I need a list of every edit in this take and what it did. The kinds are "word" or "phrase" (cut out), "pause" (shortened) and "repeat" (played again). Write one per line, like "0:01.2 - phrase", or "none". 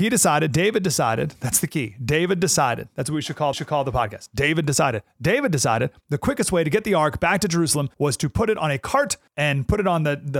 0:03.5 - repeat
0:07.9 - pause
0:09.3 - pause